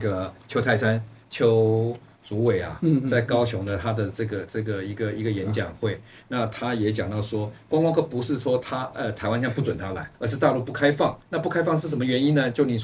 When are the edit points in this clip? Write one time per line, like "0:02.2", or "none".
0:10.1
0:11.2